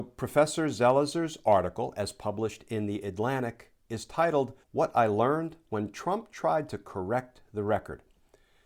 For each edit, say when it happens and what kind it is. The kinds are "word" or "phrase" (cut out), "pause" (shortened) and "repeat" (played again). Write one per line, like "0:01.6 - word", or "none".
0:04.6 - pause